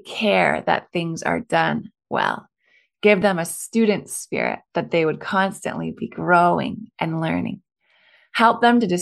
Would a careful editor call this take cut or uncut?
uncut